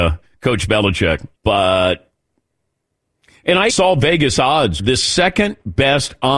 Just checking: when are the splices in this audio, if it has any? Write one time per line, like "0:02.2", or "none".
0:01.3
0:03.7
0:04.8